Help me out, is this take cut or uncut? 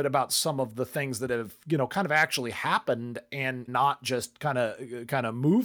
cut